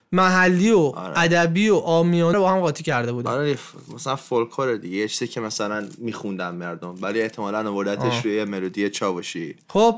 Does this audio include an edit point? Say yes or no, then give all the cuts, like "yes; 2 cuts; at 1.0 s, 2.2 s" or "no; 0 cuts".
yes; 1 cut; at 2.3 s